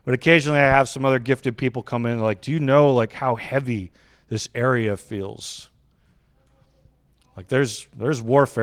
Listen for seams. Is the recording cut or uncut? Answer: uncut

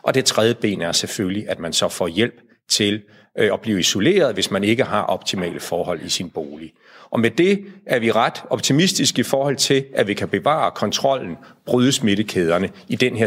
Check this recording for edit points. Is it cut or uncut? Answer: uncut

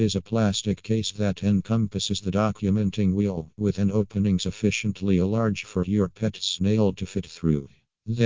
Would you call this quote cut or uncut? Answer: uncut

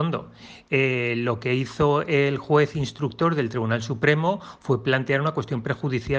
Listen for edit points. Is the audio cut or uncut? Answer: uncut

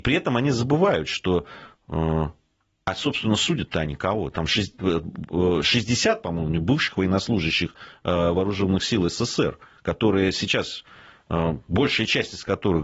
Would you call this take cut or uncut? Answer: uncut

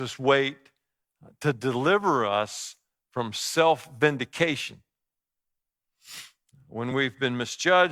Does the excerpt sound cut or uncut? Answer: uncut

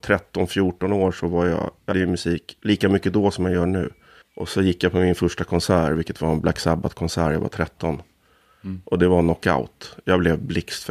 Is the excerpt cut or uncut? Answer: cut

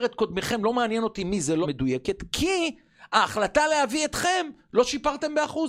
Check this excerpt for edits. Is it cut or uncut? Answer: cut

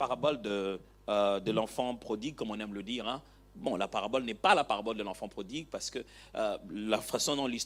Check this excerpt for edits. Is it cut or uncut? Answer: uncut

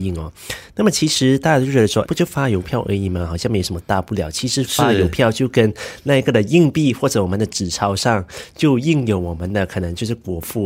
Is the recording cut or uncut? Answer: cut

